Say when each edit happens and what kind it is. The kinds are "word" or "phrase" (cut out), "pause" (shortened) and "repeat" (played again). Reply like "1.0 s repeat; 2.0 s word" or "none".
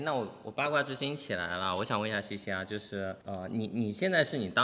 3.2 s pause